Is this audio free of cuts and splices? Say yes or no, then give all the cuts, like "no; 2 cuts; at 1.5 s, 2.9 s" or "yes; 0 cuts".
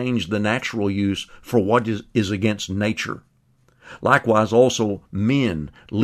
yes; 0 cuts